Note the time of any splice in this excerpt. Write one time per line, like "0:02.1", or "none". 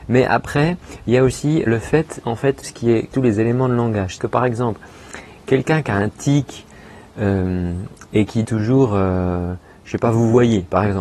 0:01.7
0:02.2
0:02.6
0:03.1
0:04.2
0:08.4